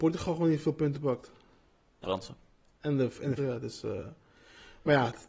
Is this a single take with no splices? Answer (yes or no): no